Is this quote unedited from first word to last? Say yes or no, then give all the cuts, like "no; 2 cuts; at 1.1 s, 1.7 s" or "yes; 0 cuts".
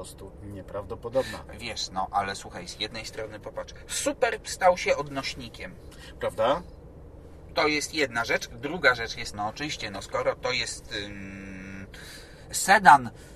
no; 1 cut; at 9.3 s